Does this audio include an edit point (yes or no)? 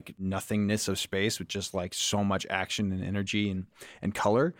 no